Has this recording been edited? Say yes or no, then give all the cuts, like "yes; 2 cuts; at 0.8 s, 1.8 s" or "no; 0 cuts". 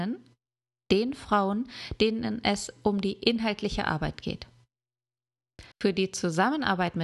yes; 1 cut; at 5.7 s